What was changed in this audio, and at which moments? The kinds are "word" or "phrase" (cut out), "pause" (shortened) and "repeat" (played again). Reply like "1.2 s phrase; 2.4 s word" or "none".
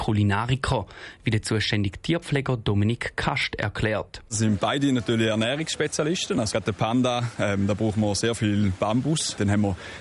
none